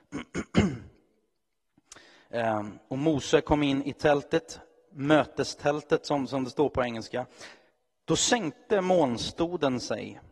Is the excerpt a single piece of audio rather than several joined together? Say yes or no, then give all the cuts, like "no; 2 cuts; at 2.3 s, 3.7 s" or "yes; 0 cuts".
yes; 0 cuts